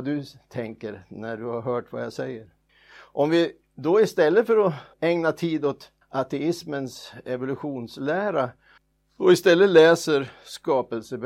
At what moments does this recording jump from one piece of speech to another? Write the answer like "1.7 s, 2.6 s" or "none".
2.7 s, 4.9 s, 6.0 s, 8.8 s